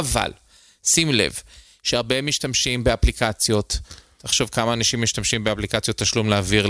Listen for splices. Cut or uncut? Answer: uncut